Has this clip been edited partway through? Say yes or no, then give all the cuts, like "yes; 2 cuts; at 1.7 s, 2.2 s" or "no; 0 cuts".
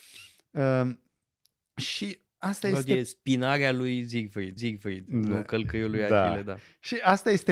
yes; 2 cuts; at 2.3 s, 4.6 s